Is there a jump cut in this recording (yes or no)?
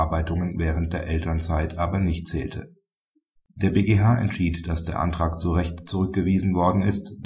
no